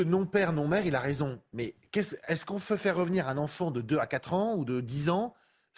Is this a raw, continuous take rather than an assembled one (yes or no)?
yes